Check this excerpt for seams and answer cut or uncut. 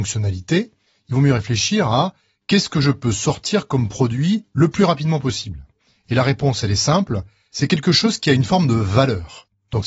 uncut